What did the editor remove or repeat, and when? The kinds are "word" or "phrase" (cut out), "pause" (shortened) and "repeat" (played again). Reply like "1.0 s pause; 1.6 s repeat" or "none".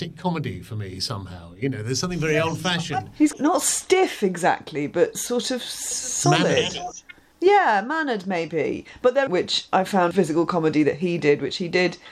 3.3 s word; 7.3 s pause; 9.3 s phrase; 10.1 s phrase